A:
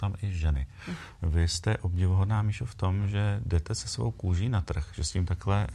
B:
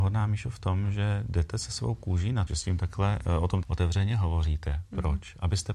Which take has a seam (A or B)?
B